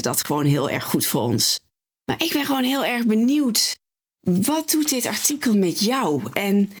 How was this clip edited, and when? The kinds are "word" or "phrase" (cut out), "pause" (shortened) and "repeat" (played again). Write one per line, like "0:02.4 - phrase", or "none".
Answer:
none